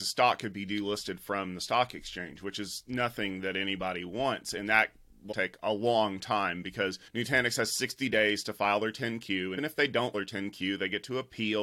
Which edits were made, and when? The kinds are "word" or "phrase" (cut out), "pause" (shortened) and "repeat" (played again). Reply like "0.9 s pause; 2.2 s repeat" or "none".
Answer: 5.3 s word; 7.1 s pause; 9.6 s word; 10.1 s word